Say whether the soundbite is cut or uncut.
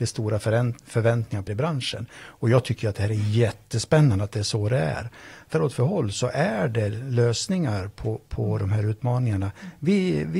cut